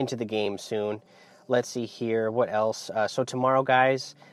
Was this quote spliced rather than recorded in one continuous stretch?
no; 0 cuts

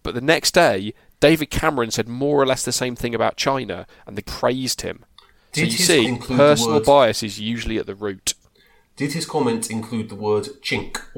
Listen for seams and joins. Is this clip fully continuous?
no; 2 cuts; at 4.2 s, 6.0 s

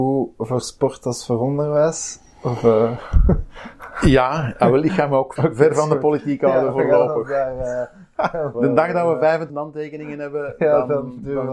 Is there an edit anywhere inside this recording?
yes; 3 cuts; at 5.4 s, 8.5 s, 9.5 s

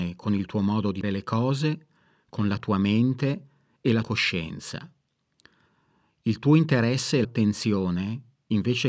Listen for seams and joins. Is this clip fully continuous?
no; 3 cuts; at 1.0 s, 4.0 s, 7.2 s

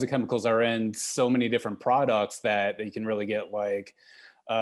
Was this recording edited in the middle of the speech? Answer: no; 0 cuts

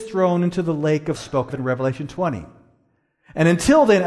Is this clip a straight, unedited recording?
no; 2 cuts; at 1.2 s, 1.5 s

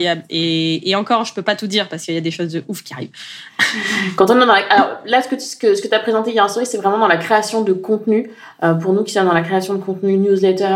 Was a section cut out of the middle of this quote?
no; 0 cuts

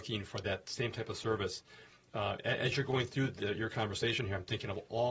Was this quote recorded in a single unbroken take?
yes; 0 cuts

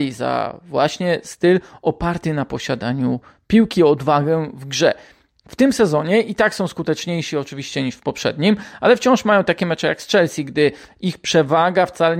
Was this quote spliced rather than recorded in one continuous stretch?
no; 0 cuts

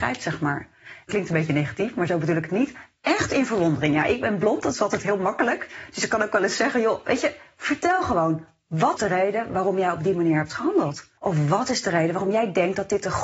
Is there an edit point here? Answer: yes; 3 cuts; at 1.1 s, 9.0 s, 11.2 s

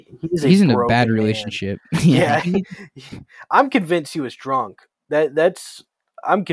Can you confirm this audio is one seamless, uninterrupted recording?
yes; 0 cuts

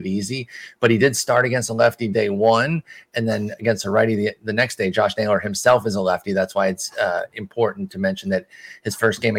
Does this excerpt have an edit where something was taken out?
no; 0 cuts

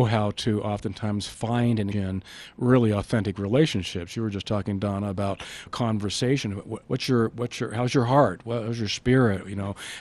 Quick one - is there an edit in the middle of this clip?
yes; 3 cuts; at 1.9 s, 5.7 s, 6.8 s

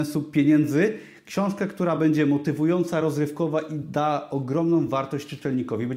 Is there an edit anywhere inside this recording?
no; 0 cuts

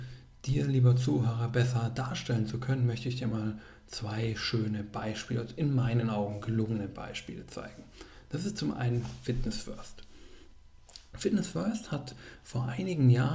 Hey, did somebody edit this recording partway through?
no; 0 cuts

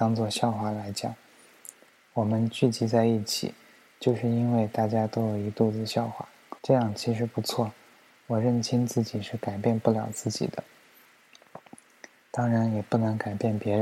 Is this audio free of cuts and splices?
no; 1 cut; at 6.6 s

